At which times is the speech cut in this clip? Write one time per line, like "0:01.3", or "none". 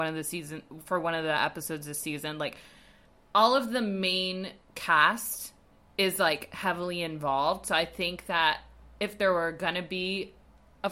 none